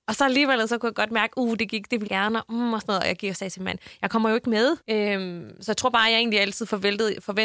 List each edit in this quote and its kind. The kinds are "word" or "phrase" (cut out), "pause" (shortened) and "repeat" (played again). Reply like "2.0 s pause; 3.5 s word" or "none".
2.1 s word; 4.8 s pause